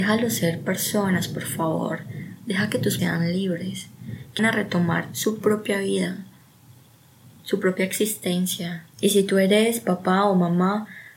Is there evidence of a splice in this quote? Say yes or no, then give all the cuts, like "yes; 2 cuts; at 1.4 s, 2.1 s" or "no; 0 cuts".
yes; 2 cuts; at 3.0 s, 4.4 s